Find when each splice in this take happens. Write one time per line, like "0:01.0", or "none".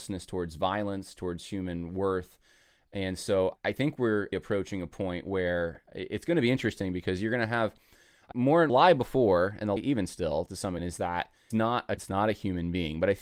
0:03.6
0:04.3
0:08.3
0:08.7
0:09.8
0:10.8
0:11.5
0:12.0